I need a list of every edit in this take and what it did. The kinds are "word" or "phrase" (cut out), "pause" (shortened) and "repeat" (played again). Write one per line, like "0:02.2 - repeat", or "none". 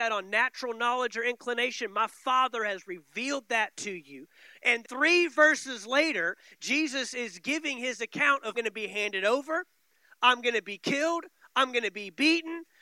0:04.8 - word
0:08.5 - word